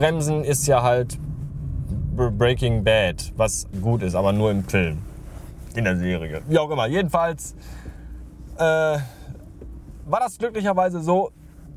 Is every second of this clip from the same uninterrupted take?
no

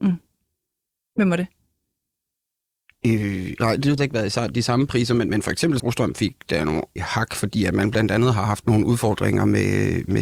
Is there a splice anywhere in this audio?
yes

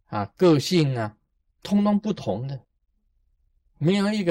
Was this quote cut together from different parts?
no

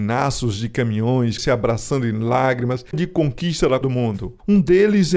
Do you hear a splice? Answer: yes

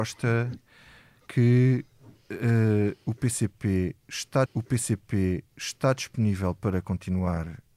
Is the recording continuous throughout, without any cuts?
no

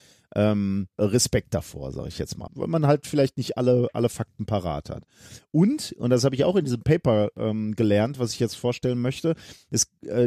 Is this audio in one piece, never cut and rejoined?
no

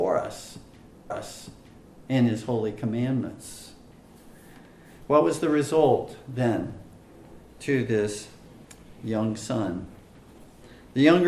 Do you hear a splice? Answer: yes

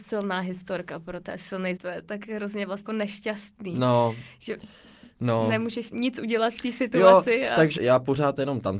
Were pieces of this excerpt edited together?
yes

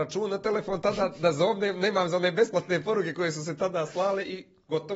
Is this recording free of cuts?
yes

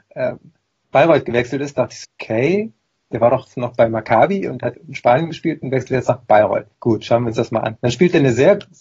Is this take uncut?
no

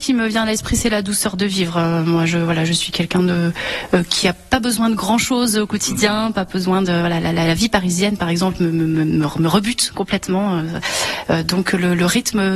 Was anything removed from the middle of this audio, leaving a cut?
no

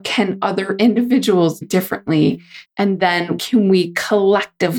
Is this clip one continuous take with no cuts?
no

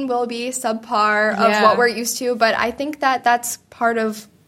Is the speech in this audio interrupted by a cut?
no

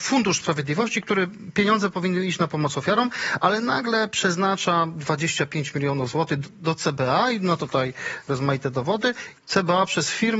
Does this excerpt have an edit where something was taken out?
yes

